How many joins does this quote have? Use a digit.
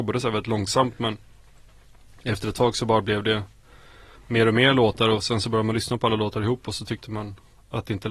0